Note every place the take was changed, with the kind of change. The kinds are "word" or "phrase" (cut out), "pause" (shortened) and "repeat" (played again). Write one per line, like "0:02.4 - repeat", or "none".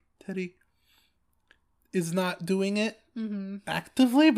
none